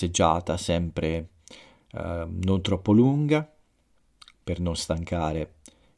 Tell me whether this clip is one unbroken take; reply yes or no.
yes